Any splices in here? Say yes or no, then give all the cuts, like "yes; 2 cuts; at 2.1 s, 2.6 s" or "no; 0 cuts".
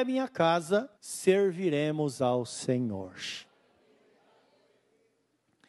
yes; 1 cut; at 1.0 s